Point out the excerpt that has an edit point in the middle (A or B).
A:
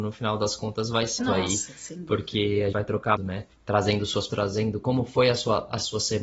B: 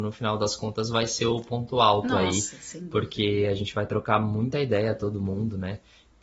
A